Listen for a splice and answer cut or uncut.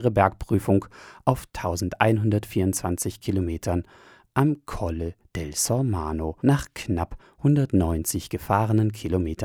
uncut